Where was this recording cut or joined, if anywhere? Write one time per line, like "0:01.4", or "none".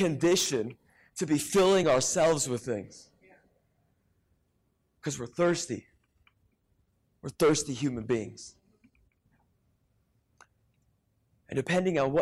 none